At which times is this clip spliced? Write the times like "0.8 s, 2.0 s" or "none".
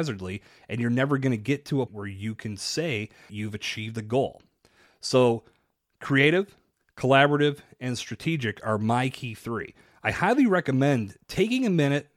1.9 s, 3.3 s